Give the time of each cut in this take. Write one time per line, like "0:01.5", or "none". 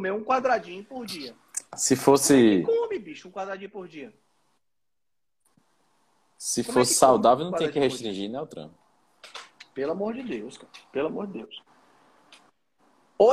0:01.7